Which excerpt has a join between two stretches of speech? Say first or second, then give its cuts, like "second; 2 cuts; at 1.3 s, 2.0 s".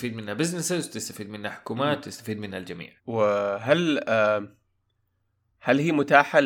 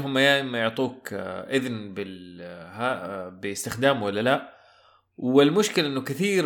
first; 1 cut; at 3.0 s